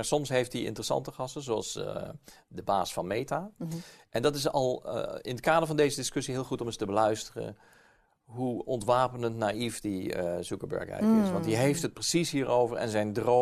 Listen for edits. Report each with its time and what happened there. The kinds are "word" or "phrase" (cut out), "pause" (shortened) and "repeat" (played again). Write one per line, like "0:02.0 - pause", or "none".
none